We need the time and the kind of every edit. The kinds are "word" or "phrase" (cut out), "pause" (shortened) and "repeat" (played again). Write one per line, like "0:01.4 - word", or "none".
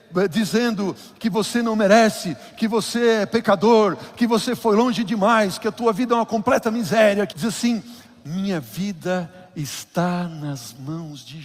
0:07.3 - word

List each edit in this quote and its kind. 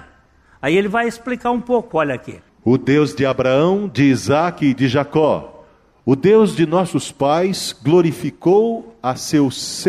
none

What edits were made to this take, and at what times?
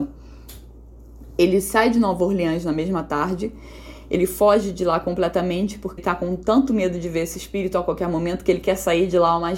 0:06.0 - word

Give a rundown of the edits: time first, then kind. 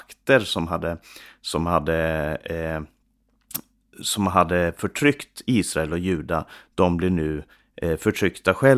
none

